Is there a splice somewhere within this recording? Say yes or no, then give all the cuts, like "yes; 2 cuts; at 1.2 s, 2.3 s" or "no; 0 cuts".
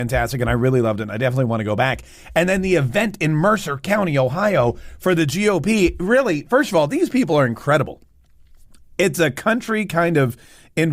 no; 0 cuts